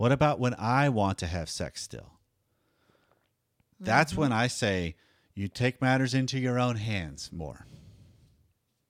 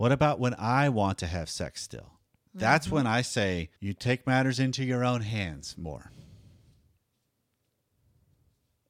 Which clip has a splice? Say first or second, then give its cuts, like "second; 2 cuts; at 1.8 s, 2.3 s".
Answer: second; 2 cuts; at 2.3 s, 3.8 s